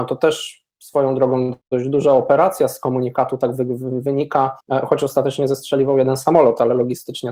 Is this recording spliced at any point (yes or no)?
yes